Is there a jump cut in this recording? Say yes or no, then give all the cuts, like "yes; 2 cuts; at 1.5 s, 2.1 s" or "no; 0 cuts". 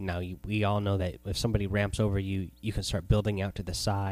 no; 0 cuts